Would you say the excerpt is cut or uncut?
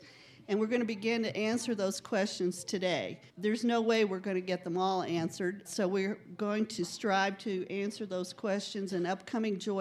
cut